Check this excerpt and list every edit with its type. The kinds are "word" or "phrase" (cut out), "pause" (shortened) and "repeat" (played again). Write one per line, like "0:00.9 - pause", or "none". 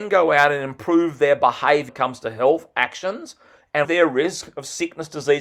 0:01.9 - word
0:03.8 - word